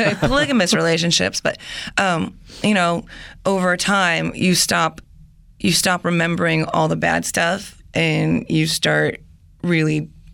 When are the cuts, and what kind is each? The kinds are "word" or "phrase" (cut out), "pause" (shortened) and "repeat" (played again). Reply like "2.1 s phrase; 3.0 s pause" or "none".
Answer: none